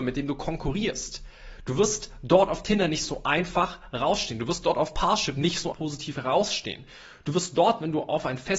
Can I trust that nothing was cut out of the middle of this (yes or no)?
no